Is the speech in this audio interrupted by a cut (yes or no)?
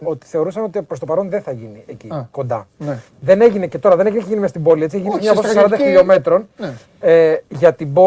no